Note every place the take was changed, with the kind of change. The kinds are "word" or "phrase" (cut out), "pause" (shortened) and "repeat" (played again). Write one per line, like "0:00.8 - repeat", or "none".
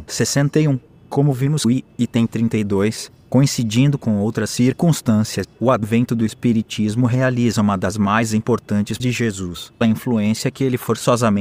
0:01.6 - word
0:09.0 - word
0:09.8 - word